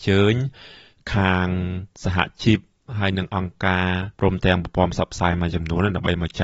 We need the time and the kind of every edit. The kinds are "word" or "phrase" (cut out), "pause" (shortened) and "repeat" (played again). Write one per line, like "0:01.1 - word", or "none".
0:01.9 - pause
0:04.1 - pause